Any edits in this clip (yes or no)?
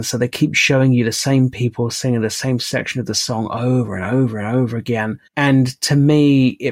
yes